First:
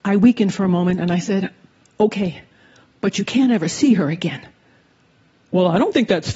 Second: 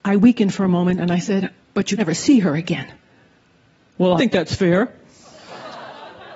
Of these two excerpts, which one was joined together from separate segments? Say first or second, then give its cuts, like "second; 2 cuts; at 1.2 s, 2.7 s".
second; 3 cuts; at 1.6 s, 2.0 s, 4.2 s